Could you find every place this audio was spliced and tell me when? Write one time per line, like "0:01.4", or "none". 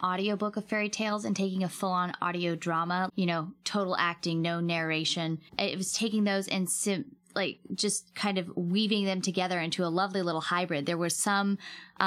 0:03.1
0:05.5